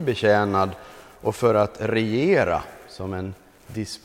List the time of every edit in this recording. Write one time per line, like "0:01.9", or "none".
none